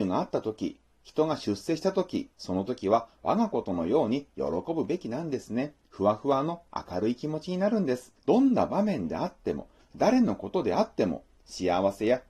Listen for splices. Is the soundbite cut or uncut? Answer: cut